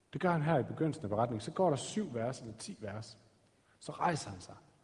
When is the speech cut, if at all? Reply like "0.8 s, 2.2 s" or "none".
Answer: none

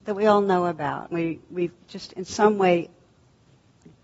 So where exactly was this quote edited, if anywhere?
1.1 s

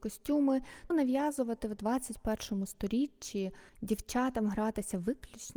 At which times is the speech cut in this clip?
0.9 s, 3.7 s

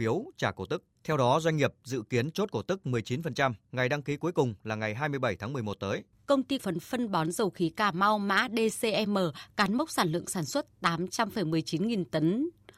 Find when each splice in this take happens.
0.9 s, 3.6 s, 6.1 s, 6.6 s

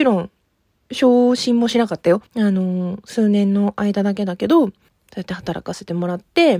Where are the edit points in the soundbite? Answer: 2.3 s, 4.9 s

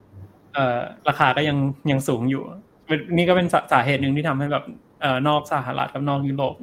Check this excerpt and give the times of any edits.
1.0 s

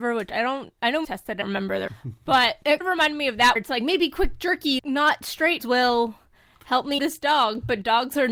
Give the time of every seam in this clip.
1.0 s, 1.4 s, 1.9 s, 2.8 s, 3.6 s, 4.8 s, 5.6 s, 7.0 s

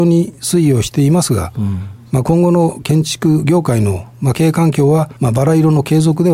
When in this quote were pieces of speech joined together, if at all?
5.2 s

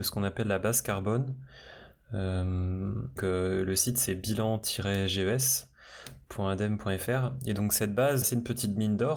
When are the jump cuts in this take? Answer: 3.2 s, 8.2 s

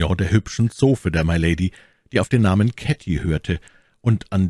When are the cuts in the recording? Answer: none

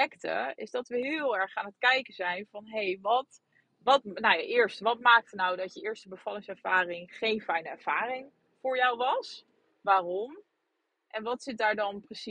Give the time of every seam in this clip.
none

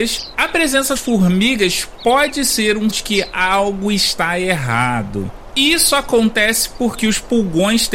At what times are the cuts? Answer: 1.0 s, 2.9 s

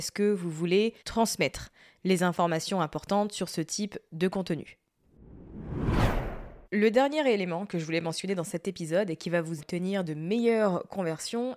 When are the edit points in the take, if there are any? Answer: 1.0 s, 6.6 s, 9.6 s

